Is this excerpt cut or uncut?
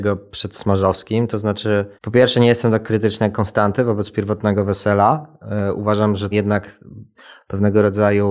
cut